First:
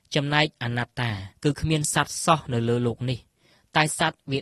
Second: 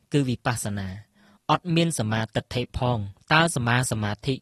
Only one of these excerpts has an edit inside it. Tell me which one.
first; 1 cut; at 1.4 s

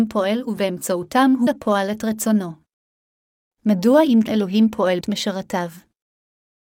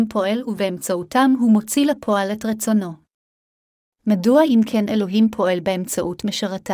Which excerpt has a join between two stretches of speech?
first; 3 cuts; at 1.5 s, 4.3 s, 5.0 s

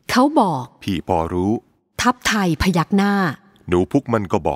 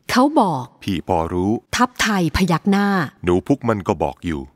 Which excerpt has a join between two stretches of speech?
second; 2 cuts; at 1.7 s, 3.2 s

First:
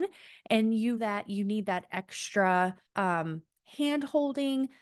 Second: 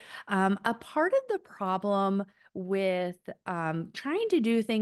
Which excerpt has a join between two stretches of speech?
first; 2 cuts; at 1.0 s, 2.9 s

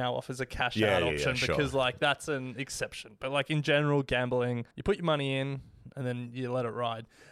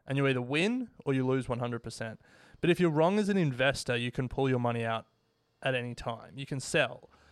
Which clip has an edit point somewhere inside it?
first; 1 cut; at 4.7 s

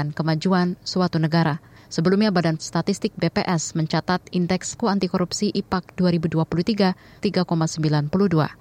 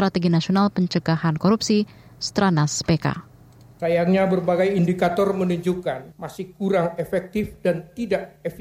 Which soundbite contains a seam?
first; 4 cuts; at 1.8 s, 2.6 s, 4.8 s, 7.2 s

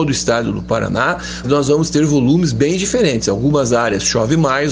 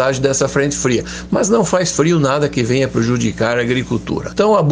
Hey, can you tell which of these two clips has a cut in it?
first; 1 cut; at 1.4 s

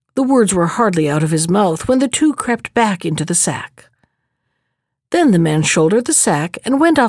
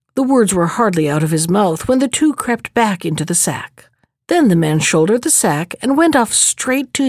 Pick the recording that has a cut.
second; 1 cut; at 4.0 s

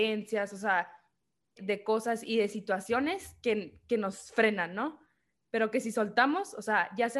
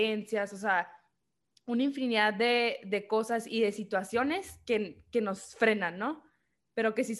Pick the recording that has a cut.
first; 1 cut; at 1.6 s

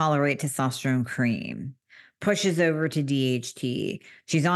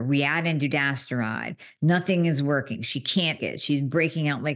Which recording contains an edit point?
second; 1 cut; at 3.4 s

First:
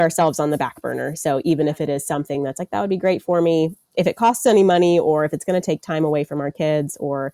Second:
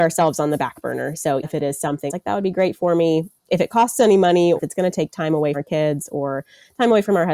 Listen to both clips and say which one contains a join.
second; 4 cuts; at 1.4 s, 2.1 s, 4.6 s, 5.5 s

